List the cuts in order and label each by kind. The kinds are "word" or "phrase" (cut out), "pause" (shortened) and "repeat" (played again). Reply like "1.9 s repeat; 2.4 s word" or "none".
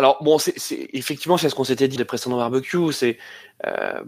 2.0 s word